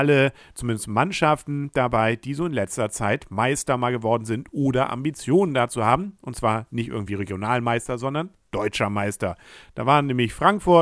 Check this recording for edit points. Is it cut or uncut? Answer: uncut